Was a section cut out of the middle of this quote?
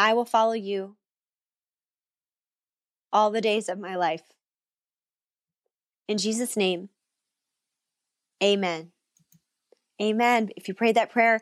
no; 0 cuts

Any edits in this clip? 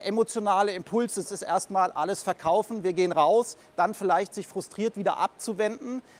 yes; 1 cut; at 1.2 s

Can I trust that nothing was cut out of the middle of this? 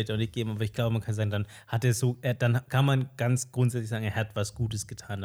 yes; 0 cuts

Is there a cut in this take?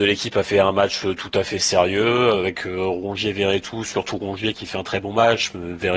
no; 0 cuts

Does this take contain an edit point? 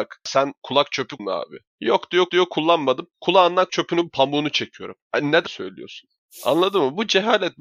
yes; 6 cuts; at 1.2 s, 1.7 s, 2.3 s, 3.7 s, 5.0 s, 5.5 s

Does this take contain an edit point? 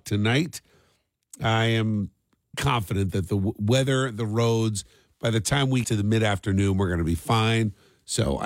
yes; 2 cuts; at 2.5 s, 5.8 s

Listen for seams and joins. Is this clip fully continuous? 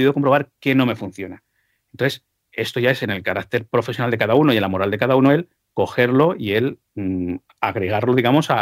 yes; 0 cuts

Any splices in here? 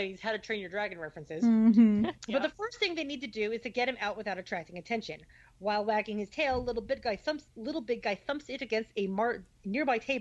yes; 1 cut; at 2.2 s

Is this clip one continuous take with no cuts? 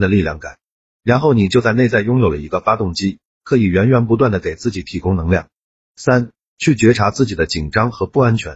yes; 0 cuts

